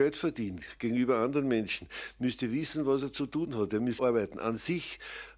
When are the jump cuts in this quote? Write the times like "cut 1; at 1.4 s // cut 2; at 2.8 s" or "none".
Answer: cut 1; at 4.0 s